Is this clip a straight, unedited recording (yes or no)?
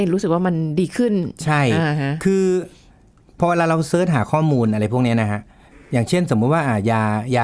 yes